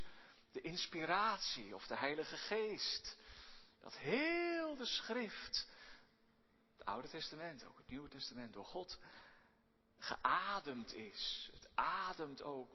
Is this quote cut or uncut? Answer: uncut